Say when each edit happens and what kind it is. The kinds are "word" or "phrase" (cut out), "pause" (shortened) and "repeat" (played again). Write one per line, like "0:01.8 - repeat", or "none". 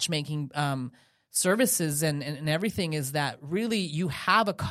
none